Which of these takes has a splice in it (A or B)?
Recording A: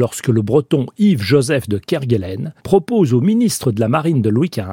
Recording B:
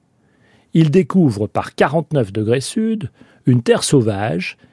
A